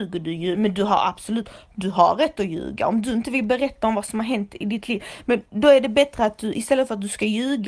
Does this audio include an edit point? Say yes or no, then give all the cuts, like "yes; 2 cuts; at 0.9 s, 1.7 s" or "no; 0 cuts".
no; 0 cuts